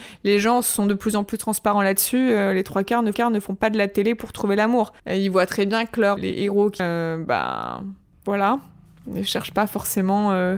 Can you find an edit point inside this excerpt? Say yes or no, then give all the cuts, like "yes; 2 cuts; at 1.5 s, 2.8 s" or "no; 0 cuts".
yes; 4 cuts; at 3.1 s, 5.0 s, 6.2 s, 6.8 s